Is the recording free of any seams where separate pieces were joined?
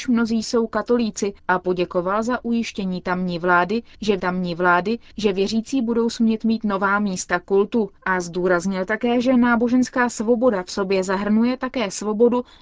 no; 3 cuts; at 1.4 s, 4.2 s, 8.0 s

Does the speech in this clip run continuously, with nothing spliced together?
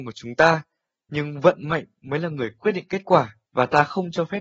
no; 1 cut; at 3.5 s

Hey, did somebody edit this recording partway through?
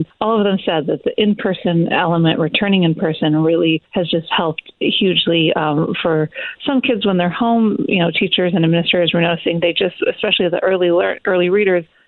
no; 0 cuts

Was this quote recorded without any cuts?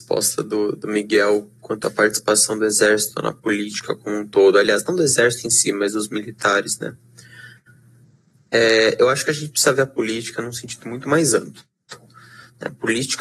yes; 0 cuts

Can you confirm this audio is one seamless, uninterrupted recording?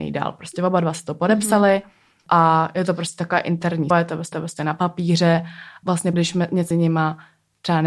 no; 5 cuts; at 3.9 s, 4.3 s, 5.8 s, 6.1 s, 6.7 s

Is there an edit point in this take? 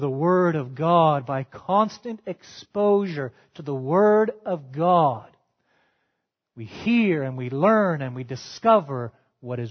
no; 0 cuts

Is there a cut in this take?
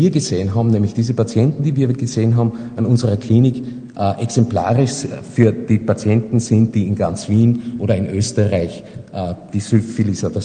no; 0 cuts

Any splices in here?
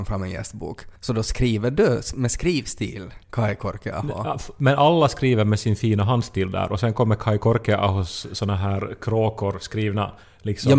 yes; 2 cuts; at 1.0 s, 3.2 s

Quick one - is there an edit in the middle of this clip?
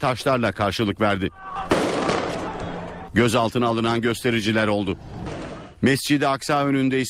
no; 0 cuts

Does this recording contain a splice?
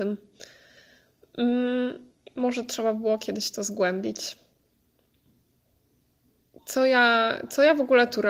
no; 0 cuts

